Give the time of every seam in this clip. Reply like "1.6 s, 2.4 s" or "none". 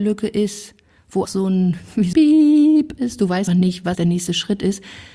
1.2 s, 2.1 s, 3.5 s, 4.0 s